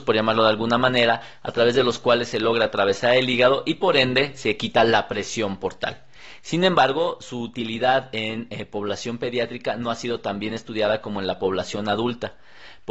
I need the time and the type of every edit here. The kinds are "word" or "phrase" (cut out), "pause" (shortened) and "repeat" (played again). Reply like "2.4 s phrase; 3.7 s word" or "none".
none